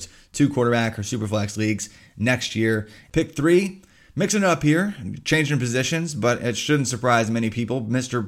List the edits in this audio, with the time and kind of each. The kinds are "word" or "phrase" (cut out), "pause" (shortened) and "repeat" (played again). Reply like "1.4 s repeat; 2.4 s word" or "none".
none